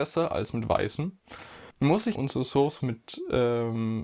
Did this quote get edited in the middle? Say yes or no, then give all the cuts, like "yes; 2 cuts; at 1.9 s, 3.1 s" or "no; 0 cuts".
yes; 3 cuts; at 1.7 s, 2.1 s, 2.8 s